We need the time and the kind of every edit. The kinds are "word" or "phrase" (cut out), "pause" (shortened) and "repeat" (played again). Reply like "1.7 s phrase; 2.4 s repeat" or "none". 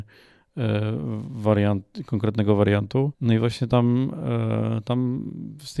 3.1 s pause